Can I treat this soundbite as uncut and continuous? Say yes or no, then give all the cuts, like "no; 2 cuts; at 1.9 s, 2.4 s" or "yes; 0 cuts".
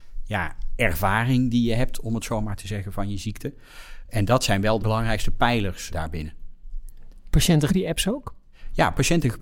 no; 3 cuts; at 4.8 s, 5.9 s, 7.7 s